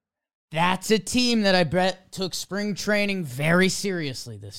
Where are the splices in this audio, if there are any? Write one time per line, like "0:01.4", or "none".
none